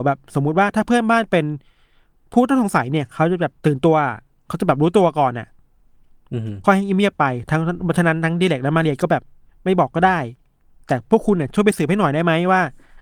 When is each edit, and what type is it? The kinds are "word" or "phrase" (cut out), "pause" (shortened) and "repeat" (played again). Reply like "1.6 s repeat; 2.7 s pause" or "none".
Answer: 3.6 s pause; 9.5 s phrase